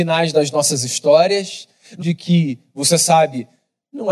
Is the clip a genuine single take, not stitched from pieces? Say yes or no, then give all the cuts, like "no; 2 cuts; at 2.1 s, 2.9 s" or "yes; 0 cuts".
no; 1 cut; at 2.0 s